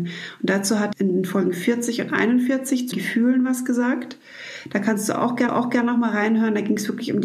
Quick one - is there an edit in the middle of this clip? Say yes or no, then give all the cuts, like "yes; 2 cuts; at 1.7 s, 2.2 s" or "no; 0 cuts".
yes; 3 cuts; at 0.9 s, 2.9 s, 5.5 s